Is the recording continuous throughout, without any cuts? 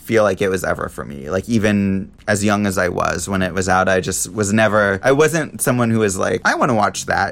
no; 1 cut; at 2.2 s

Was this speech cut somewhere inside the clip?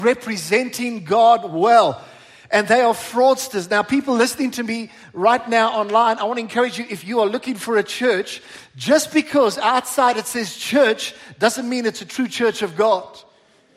no; 0 cuts

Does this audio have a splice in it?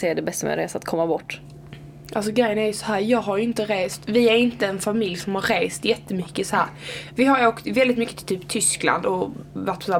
no; 0 cuts

